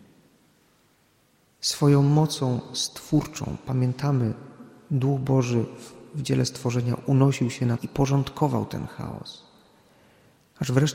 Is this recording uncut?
no; 1 cut; at 7.8 s

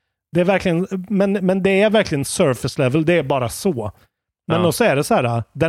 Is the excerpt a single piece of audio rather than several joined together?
yes; 0 cuts

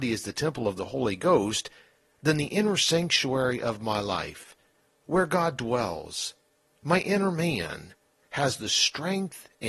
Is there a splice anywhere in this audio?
no; 0 cuts

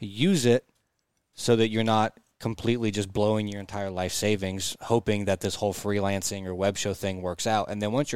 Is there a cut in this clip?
no; 0 cuts

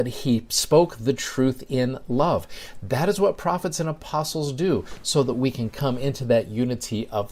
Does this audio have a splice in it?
no; 0 cuts

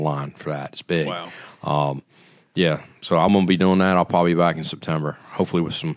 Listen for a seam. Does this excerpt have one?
no; 0 cuts

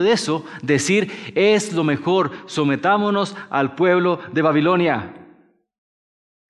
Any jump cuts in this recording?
no; 0 cuts

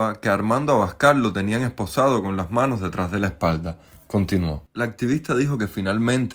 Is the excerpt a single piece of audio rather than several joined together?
no; 1 cut; at 4.7 s

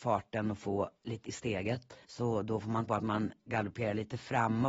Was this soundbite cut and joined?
yes; 3 cuts; at 1.2 s, 2.0 s, 2.9 s

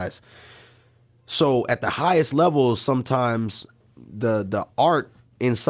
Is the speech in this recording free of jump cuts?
yes; 0 cuts

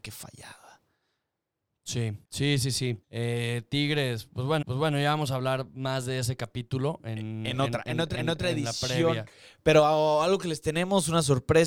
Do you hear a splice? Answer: yes; 4 cuts; at 2.2 s, 3.0 s, 4.6 s, 8.1 s

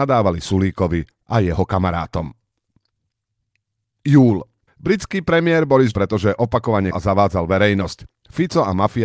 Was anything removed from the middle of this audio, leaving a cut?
yes; 3 cuts; at 4.7 s, 5.9 s, 6.9 s

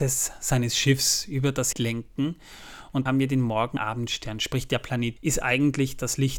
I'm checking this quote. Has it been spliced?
yes; 4 cuts; at 1.7 s, 3.1 s, 3.8 s, 5.2 s

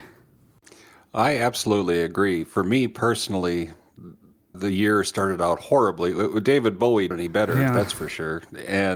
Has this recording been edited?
yes; 2 cuts; at 4.5 s, 7.1 s

